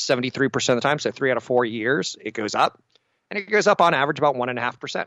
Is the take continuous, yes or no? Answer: yes